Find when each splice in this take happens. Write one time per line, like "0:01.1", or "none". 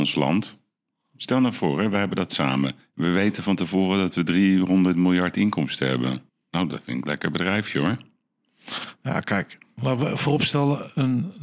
0:02.8
0:06.3